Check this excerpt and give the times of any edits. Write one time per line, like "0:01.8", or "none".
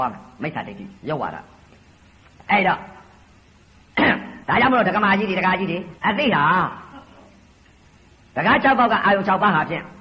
0:01.0
0:04.4
0:06.0